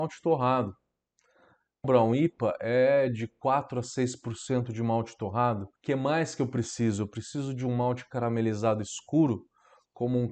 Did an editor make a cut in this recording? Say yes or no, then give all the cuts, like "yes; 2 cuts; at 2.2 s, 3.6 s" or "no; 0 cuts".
yes; 2 cuts; at 1.8 s, 5.8 s